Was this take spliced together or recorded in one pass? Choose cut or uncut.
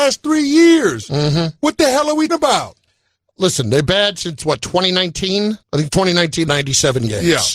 cut